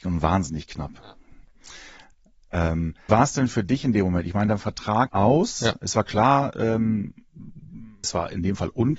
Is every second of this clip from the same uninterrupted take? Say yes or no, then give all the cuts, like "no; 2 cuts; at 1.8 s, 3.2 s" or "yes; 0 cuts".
no; 3 cuts; at 3.1 s, 5.1 s, 8.0 s